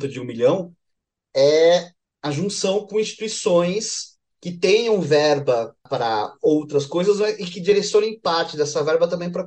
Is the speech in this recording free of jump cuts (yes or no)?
yes